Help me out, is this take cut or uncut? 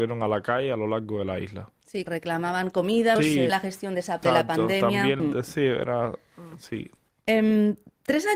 cut